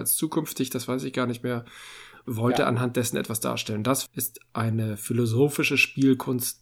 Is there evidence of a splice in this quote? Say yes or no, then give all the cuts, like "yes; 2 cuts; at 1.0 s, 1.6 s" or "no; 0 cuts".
yes; 1 cut; at 2.2 s